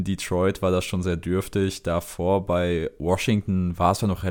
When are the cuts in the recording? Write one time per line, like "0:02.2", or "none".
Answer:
0:01.0